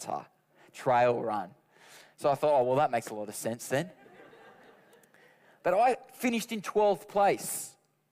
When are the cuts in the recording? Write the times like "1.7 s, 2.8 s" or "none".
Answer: none